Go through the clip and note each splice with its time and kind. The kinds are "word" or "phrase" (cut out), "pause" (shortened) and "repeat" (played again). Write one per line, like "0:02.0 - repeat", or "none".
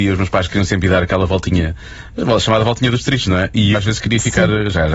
0:03.7 - word

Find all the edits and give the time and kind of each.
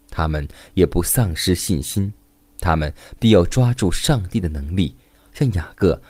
none

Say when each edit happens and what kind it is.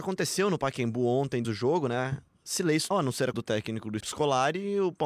0:01.4 - word
0:02.9 - word
0:03.3 - word
0:04.0 - word

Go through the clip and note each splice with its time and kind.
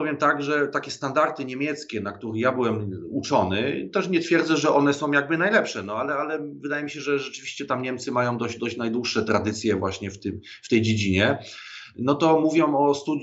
none

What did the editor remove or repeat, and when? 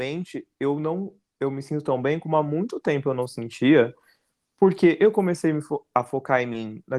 none

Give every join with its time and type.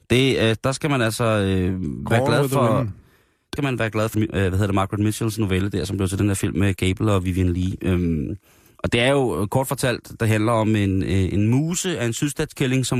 0:03.6 - word
0:04.1 - word
0:06.8 - word

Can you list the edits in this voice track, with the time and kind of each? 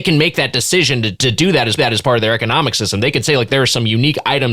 0:01.1 - word
0:01.8 - repeat

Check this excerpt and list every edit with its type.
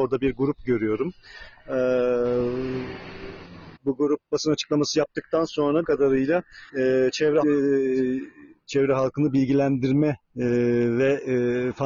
0:03.8 - pause
0:05.8 - word
0:06.7 - pause
0:07.4 - word
0:10.2 - pause

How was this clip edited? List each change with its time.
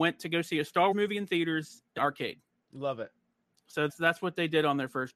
0:00.9 - word
0:02.0 - phrase
0:03.9 - word

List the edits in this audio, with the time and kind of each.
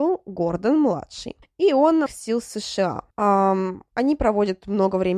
0:01.4 - pause
0:02.1 - phrase
0:03.1 - pause

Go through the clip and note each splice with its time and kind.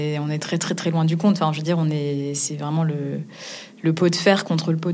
none

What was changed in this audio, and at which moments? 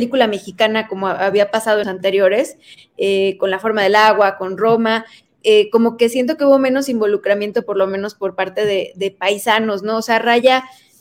0:01.8 - word

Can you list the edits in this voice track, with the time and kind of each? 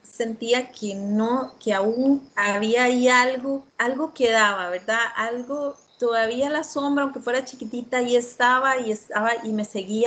0:02.3 - pause
0:03.7 - pause
0:05.9 - pause

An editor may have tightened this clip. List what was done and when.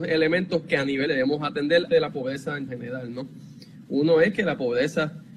0:01.1 - word
0:01.9 - word
0:02.7 - word

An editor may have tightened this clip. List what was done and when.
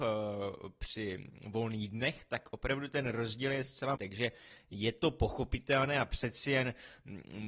0:04.0 - word

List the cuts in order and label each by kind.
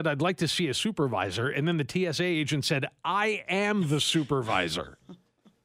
none

